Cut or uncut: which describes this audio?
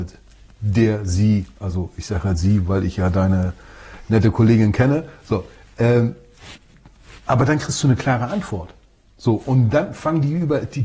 uncut